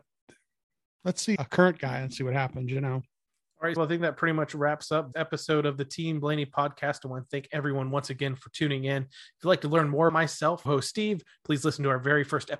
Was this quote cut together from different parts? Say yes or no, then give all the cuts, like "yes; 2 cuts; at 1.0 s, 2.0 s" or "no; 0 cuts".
yes; 6 cuts; at 1.4 s, 3.3 s, 3.8 s, 5.1 s, 10.1 s, 10.7 s